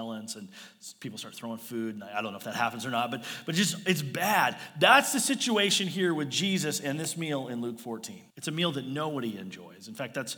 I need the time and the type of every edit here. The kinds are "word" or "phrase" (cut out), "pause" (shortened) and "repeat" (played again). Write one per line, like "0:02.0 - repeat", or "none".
0:08.3 - pause